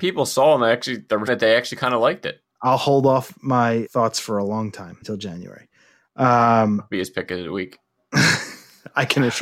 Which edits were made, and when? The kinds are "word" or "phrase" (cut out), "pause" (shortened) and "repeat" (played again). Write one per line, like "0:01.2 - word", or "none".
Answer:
0:01.3 - word
0:03.9 - word
0:05.0 - word